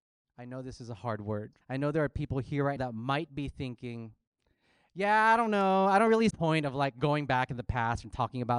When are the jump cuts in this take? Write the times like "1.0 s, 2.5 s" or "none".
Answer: 1.6 s, 2.8 s, 6.3 s